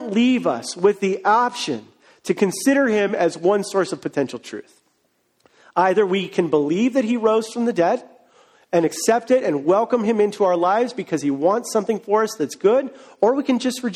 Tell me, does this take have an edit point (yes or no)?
no